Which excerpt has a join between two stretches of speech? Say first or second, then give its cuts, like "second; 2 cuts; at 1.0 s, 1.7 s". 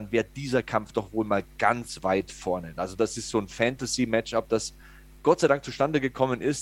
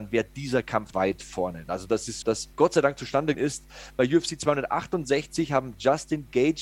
second; 4 cuts; at 0.9 s, 2.2 s, 2.5 s, 3.3 s